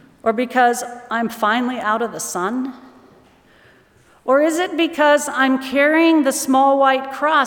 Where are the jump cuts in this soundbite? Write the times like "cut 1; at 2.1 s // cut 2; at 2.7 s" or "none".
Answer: none